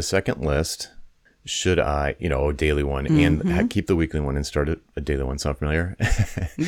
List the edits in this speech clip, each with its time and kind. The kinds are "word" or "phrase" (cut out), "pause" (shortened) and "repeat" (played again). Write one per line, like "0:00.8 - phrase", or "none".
none